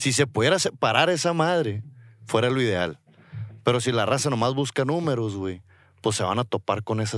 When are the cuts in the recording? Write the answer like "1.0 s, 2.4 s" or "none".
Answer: none